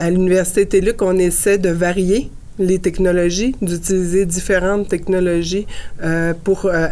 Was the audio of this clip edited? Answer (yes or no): no